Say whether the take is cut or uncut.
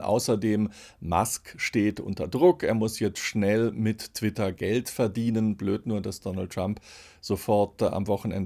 uncut